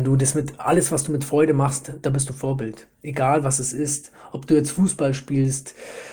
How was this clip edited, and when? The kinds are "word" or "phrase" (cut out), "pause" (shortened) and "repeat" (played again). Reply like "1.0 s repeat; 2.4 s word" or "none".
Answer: none